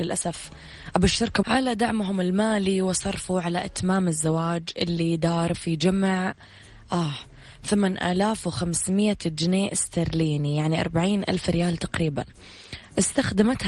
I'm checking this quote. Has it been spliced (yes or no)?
yes